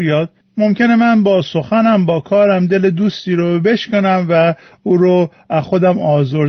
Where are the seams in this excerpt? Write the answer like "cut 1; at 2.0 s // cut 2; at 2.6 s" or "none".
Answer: none